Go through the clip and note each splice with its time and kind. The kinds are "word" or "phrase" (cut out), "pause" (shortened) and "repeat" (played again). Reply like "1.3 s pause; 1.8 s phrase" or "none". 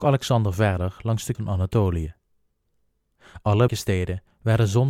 1.3 s word; 3.7 s word